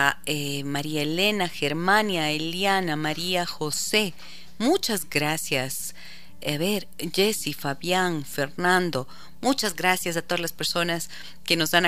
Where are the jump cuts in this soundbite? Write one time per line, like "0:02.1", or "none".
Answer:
none